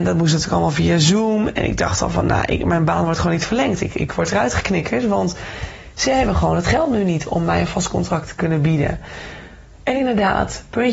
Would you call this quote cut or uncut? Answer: uncut